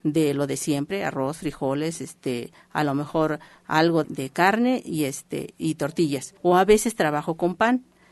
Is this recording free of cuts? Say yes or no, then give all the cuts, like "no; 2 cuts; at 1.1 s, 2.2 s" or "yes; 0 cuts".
no; 2 cuts; at 4.0 s, 6.4 s